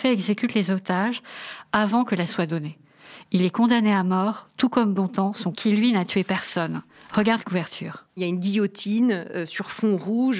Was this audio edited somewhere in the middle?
yes; 3 cuts; at 2.3 s, 5.5 s, 7.4 s

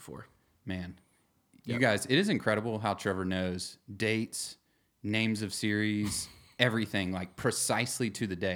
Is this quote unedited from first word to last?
yes; 0 cuts

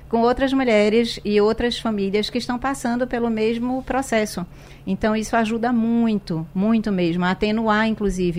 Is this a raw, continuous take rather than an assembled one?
yes; 0 cuts

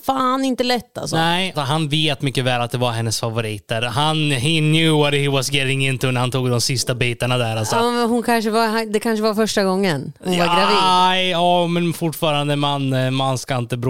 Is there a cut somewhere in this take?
yes; 1 cut; at 1.5 s

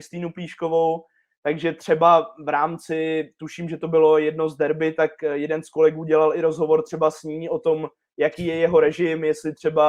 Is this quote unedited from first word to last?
yes; 0 cuts

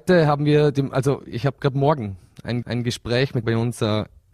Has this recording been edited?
yes; 2 cuts; at 2.6 s, 3.4 s

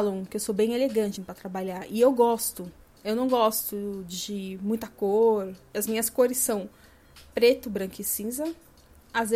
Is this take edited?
yes; 1 cut; at 1.2 s

